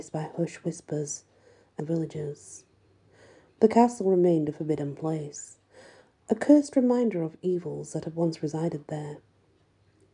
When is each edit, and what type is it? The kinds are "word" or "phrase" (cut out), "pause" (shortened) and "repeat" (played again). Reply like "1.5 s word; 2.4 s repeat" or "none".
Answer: 1.8 s phrase